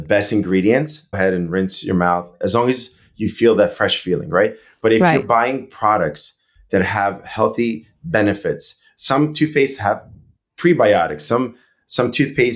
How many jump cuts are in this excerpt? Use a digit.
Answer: 1